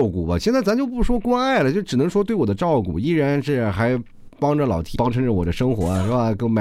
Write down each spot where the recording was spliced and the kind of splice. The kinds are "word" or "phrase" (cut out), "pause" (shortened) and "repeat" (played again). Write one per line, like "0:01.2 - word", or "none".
0:05.0 - word

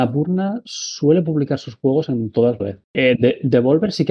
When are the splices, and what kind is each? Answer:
0:02.6 - phrase

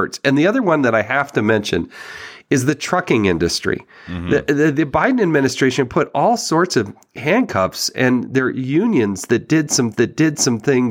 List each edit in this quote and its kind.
0:09.9 - repeat

